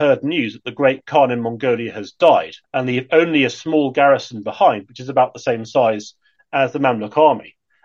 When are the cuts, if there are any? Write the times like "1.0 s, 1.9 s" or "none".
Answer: 2.6 s